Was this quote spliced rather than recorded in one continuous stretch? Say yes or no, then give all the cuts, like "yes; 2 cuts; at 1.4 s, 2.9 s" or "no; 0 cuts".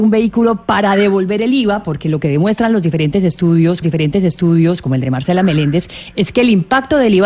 yes; 1 cut; at 3.8 s